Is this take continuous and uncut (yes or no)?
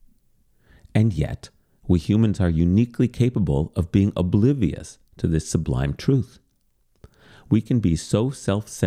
yes